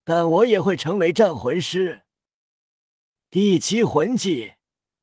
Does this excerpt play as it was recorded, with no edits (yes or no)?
yes